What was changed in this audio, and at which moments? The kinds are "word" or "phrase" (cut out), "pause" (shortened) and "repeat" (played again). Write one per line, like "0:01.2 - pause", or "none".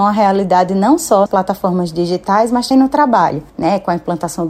0:01.3 - word
0:02.7 - word
0:03.5 - pause